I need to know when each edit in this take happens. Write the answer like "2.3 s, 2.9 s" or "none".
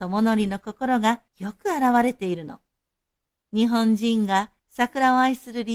1.3 s, 4.6 s